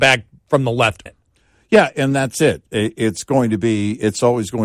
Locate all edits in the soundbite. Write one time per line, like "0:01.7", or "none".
0:01.1
0:01.9